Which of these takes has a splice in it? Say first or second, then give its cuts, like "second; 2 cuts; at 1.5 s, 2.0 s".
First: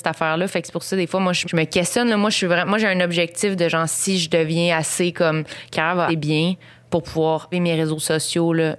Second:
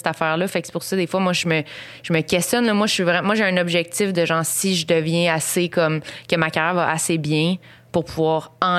first; 4 cuts; at 1.4 s, 5.7 s, 6.1 s, 7.5 s